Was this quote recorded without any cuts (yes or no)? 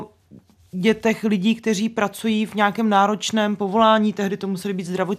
yes